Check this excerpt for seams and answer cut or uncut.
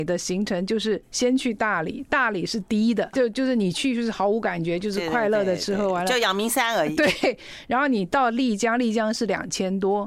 cut